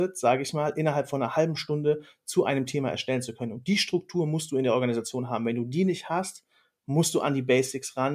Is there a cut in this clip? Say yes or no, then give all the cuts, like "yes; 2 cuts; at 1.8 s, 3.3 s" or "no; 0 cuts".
no; 0 cuts